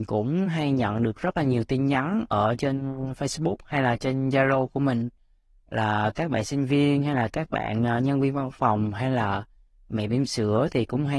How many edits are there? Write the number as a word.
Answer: zero